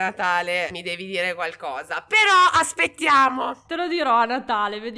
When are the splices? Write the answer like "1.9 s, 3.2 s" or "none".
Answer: none